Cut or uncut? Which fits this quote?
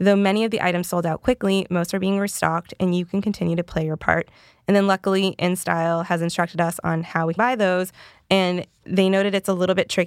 cut